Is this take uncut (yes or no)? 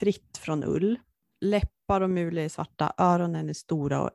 yes